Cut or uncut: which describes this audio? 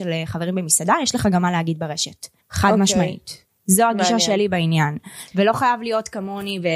cut